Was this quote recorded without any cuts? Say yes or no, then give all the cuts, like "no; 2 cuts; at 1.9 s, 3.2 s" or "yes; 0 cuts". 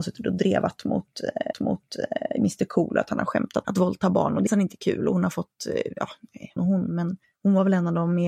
no; 5 cuts; at 1.5 s, 3.6 s, 4.5 s, 6.6 s, 7.2 s